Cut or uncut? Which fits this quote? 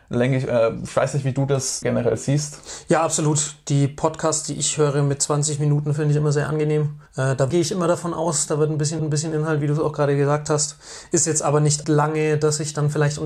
cut